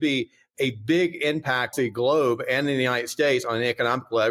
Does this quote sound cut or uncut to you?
cut